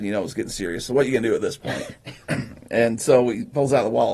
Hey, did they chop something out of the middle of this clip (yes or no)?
no